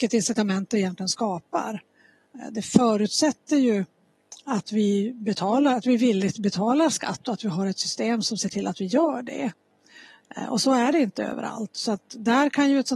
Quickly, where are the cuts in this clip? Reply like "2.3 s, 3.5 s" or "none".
none